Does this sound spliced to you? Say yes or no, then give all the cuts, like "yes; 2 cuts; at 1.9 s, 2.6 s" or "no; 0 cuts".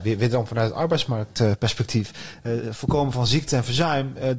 no; 0 cuts